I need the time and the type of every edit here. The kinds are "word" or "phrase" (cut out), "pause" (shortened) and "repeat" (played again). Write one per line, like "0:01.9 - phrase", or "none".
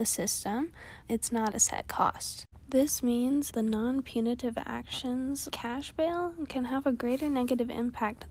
0:01.0 - word
0:01.5 - word
0:03.5 - word
0:05.5 - word